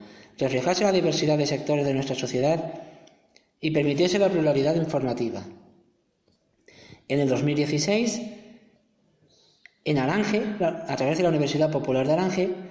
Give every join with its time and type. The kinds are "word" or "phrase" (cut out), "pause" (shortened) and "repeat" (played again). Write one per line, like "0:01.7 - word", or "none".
none